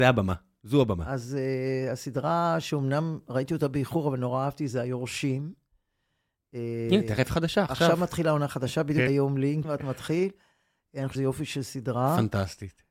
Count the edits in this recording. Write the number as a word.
four